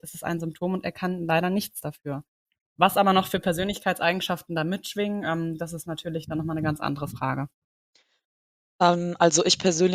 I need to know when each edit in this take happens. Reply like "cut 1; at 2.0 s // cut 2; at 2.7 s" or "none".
none